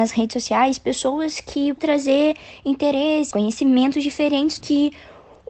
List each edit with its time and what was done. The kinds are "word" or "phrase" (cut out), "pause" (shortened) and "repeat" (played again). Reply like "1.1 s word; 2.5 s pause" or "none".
1.8 s word; 3.3 s word; 4.6 s word